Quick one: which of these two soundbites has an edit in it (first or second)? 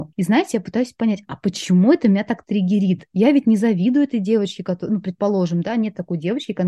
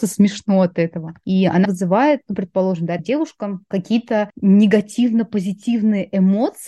second